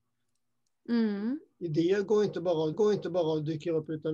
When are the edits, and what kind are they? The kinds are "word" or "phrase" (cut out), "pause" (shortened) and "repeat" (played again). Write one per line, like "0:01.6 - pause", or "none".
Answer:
0:02.7 - repeat